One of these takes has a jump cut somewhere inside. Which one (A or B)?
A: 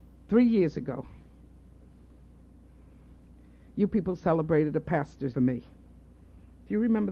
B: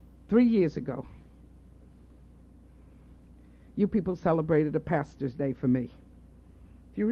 A